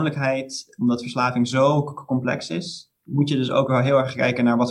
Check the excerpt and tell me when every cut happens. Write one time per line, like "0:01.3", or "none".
0:03.0